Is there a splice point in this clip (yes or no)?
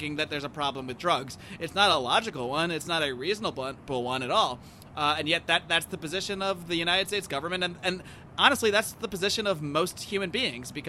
no